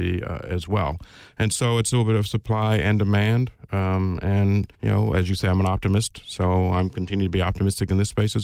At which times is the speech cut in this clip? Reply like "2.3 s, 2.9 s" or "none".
4.7 s